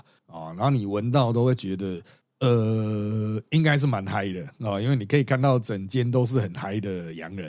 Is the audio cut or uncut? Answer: uncut